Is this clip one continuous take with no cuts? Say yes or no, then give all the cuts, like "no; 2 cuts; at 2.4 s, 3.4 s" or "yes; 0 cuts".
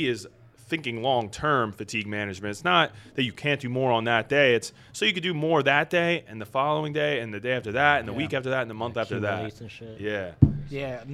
yes; 0 cuts